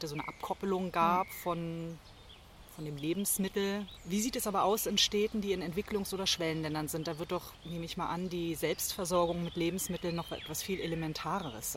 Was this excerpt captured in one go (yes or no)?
no